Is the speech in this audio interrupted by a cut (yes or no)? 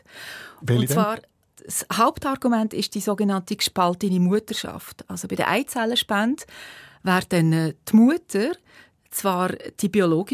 no